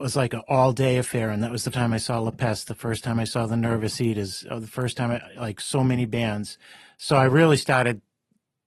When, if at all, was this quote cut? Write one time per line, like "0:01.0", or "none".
0:01.7

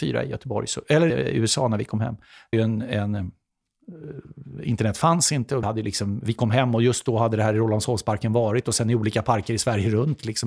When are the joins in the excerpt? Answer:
0:01.1
0:02.5
0:05.6

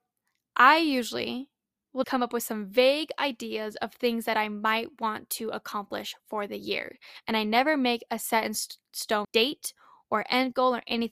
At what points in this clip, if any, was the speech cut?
0:02.0
0:09.2

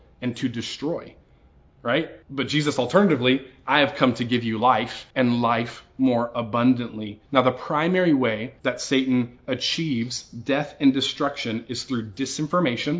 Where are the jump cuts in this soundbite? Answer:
0:02.2
0:05.1
0:07.3
0:08.6

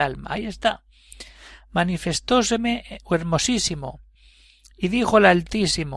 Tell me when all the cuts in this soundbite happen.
none

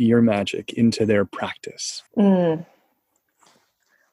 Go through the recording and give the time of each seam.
0:02.1

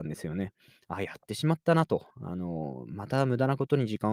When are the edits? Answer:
0:02.1

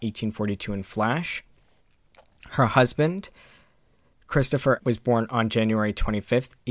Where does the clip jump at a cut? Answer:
0:04.8

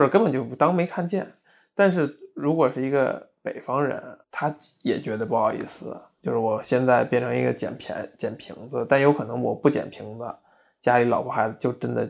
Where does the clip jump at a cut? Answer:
0:04.2

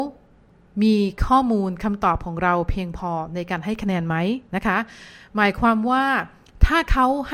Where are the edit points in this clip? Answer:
0:04.5

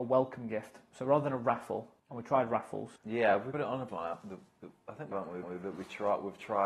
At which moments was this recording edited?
0:02.0
0:03.0
0:03.5
0:03.9
0:05.1
0:05.4

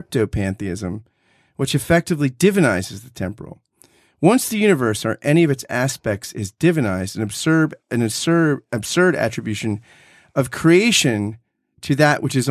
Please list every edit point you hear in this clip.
0:07.8

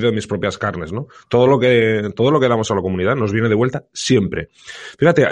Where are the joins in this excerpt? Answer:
none

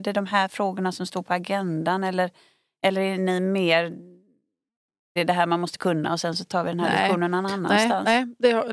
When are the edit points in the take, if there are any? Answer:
none

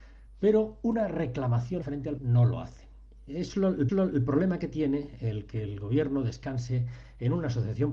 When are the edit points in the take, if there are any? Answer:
0:01.8
0:02.2
0:03.9

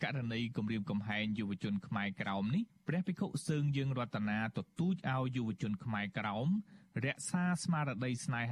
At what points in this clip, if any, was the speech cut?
none

